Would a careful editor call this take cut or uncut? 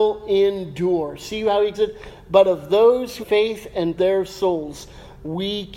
cut